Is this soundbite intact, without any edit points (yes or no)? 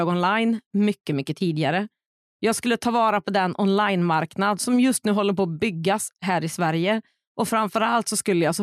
yes